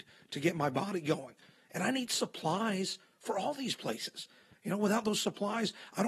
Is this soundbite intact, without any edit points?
yes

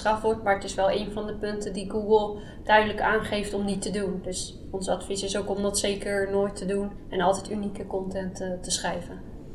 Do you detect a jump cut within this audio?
no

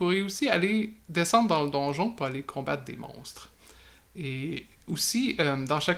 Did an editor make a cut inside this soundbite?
no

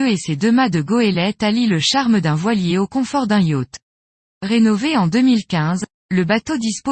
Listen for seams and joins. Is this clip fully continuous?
yes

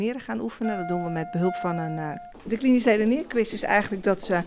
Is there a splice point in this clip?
yes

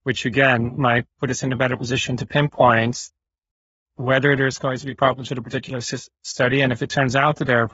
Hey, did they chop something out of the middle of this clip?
yes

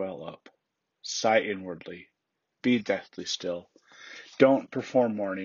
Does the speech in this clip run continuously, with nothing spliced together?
yes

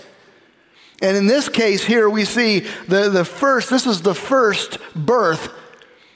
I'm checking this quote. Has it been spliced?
no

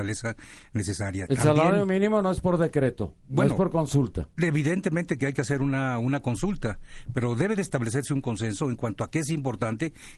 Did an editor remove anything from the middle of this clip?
yes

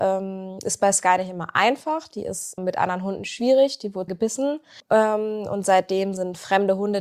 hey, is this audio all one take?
no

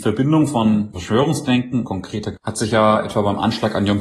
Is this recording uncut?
no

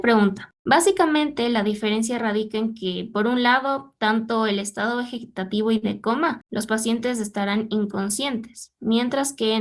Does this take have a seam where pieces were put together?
no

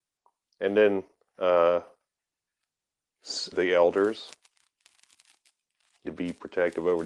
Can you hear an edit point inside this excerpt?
yes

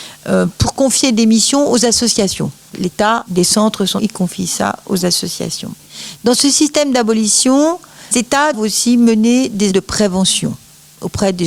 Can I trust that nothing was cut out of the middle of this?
no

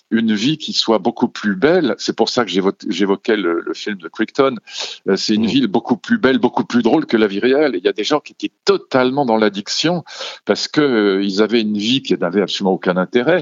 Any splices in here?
no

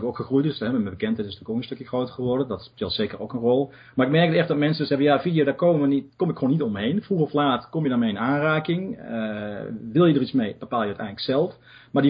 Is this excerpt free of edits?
yes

